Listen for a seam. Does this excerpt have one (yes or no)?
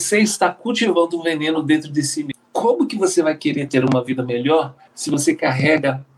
no